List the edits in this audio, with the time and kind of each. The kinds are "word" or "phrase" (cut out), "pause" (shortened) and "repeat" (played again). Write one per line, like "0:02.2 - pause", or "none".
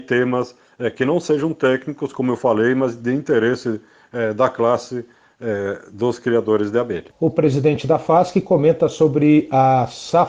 none